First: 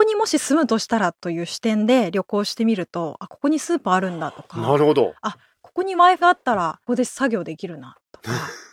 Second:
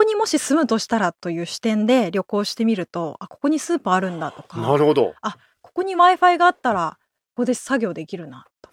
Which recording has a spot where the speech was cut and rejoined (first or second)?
first